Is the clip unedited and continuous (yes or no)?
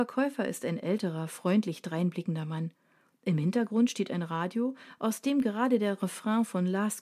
yes